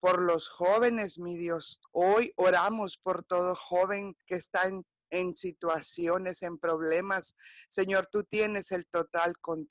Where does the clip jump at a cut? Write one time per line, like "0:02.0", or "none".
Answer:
0:01.8
0:04.2